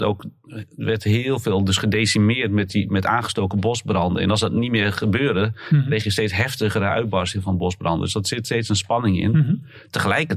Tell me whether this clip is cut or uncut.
uncut